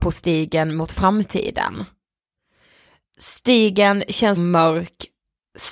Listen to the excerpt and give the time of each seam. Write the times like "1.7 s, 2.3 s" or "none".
4.4 s